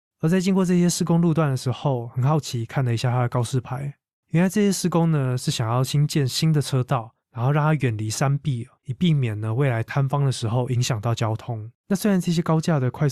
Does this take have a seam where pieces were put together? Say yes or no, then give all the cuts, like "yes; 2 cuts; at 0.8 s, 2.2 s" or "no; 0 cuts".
yes; 4 cuts; at 4.1 s, 7.2 s, 8.8 s, 11.8 s